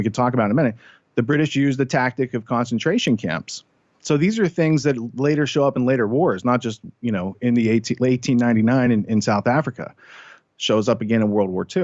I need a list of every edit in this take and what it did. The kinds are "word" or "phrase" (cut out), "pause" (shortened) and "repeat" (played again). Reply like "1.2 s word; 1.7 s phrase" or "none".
none